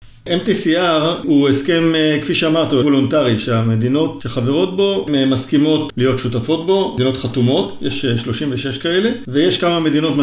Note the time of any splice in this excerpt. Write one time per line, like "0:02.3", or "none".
0:02.8